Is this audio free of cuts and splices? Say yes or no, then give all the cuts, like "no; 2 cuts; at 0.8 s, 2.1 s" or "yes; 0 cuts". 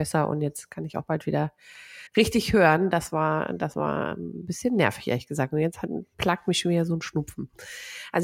no; 1 cut; at 2.1 s